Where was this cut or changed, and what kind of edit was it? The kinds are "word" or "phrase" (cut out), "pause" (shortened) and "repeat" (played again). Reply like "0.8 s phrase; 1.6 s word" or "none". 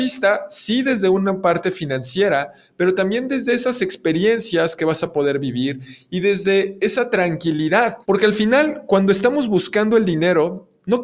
8.0 s pause